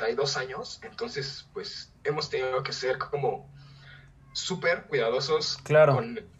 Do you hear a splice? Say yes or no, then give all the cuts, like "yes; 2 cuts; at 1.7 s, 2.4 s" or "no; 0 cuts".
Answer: no; 0 cuts